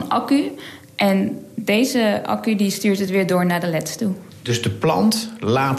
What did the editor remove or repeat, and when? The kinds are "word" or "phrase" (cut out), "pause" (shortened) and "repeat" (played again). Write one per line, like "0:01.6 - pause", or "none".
none